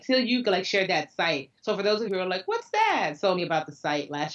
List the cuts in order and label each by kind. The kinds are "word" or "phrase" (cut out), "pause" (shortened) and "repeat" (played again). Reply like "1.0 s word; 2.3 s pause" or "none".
1.6 s pause; 2.1 s word; 3.4 s phrase